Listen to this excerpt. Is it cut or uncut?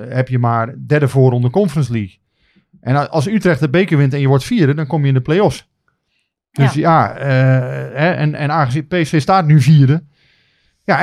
uncut